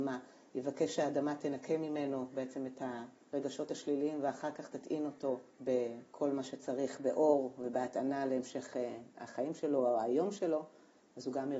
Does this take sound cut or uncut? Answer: cut